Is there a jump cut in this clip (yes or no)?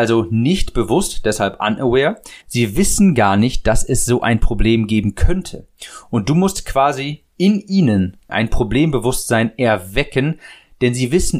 yes